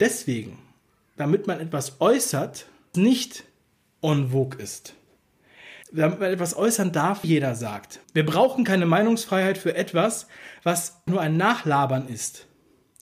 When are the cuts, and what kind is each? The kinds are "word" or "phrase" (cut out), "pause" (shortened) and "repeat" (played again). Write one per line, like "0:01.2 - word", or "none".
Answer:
0:02.9 - word
0:05.8 - pause
0:07.2 - phrase
0:08.0 - pause
0:11.1 - word